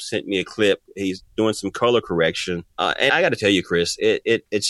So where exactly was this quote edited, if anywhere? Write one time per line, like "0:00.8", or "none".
0:02.7
0:03.1